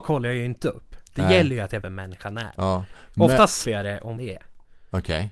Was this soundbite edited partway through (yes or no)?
yes